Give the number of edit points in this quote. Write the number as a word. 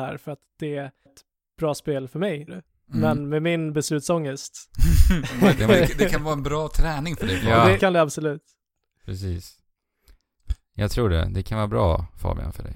three